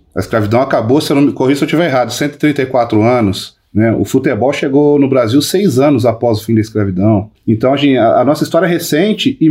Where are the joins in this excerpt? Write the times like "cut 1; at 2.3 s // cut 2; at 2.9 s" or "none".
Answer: cut 1; at 7.4 s

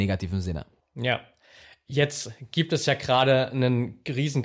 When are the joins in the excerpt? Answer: none

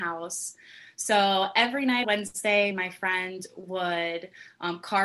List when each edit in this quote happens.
cut 1; at 2.0 s // cut 2; at 2.7 s

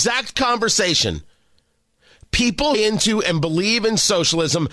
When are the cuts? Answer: cut 1; at 2.7 s

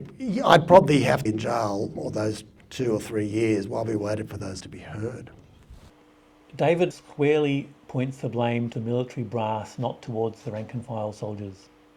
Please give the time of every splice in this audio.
cut 1; at 1.3 s // cut 2; at 2.0 s // cut 3; at 2.6 s // cut 4; at 4.6 s // cut 5; at 6.9 s // cut 6; at 8.7 s

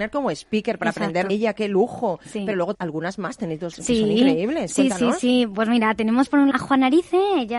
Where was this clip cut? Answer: cut 1; at 1.3 s // cut 2; at 2.7 s // cut 3; at 3.7 s // cut 4; at 6.5 s

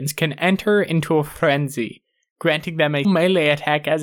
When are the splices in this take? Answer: cut 1; at 3.0 s

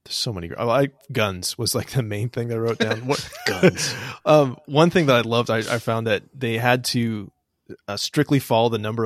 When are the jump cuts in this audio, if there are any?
none

